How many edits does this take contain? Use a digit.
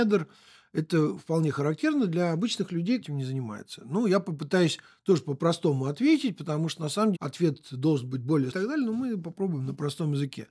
3